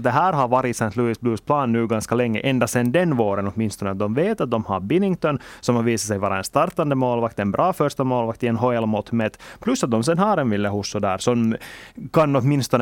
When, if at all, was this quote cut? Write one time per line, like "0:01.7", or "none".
none